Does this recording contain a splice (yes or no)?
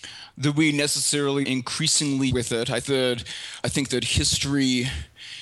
yes